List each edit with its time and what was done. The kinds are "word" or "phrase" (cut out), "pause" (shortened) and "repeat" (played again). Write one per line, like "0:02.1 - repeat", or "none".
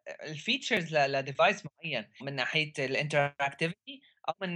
0:02.2 - word